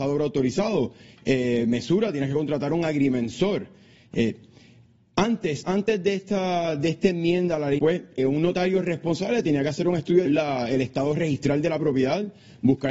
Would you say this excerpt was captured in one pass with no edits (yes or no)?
no